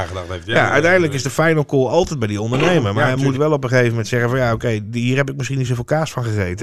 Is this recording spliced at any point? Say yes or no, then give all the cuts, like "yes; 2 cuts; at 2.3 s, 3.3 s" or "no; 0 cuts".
no; 0 cuts